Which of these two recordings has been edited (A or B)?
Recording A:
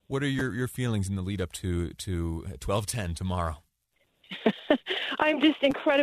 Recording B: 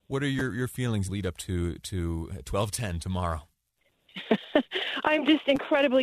B